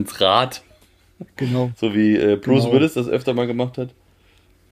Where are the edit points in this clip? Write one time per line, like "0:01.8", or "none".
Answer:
none

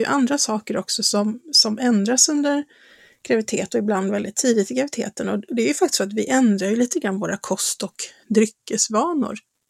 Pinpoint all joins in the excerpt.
none

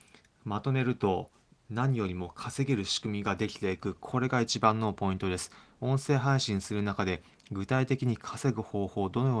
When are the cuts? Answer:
none

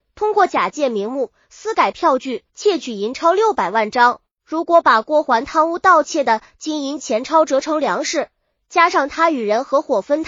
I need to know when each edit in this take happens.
0:02.5

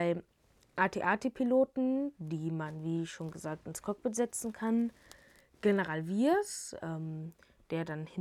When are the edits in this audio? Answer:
none

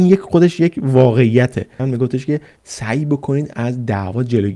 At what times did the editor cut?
0:01.8
0:02.6

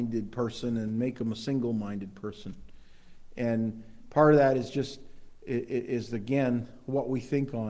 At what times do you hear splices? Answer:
none

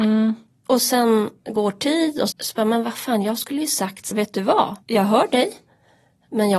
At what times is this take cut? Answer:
0:01.4
0:02.3
0:04.1
0:04.8

